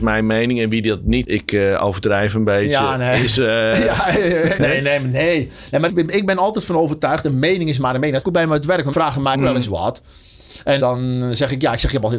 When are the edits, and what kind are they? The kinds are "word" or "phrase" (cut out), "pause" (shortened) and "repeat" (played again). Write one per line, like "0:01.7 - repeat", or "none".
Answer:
0:01.2 - word
0:04.6 - word
0:05.9 - word
0:08.2 - word
0:08.9 - word
0:09.3 - word
0:10.8 - word